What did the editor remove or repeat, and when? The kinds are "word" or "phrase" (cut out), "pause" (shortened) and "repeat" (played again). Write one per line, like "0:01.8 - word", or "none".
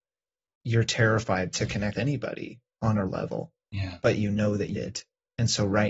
0:01.9 - word
0:03.1 - word
0:03.6 - pause
0:04.8 - word